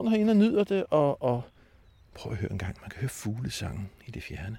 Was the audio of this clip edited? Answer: no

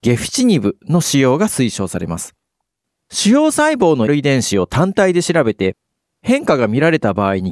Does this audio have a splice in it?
yes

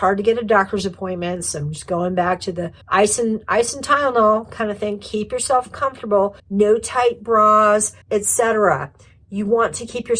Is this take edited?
yes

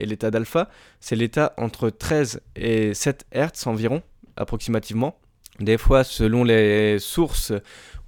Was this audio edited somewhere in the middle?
yes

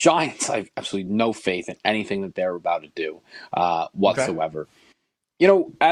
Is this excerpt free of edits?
yes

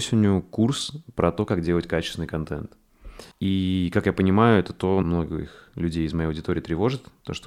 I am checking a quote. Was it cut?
yes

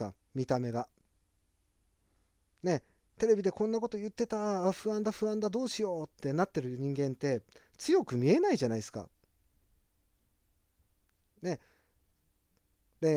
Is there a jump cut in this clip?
no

